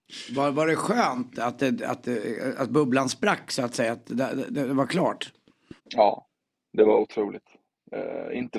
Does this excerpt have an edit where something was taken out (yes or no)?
yes